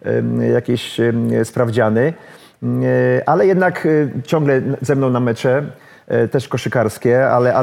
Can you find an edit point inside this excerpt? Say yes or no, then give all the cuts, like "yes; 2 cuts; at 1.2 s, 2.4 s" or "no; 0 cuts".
no; 0 cuts